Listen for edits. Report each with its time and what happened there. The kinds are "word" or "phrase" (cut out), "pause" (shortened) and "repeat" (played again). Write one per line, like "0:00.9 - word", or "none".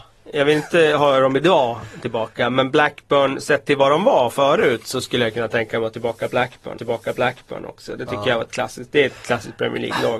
0:06.8 - repeat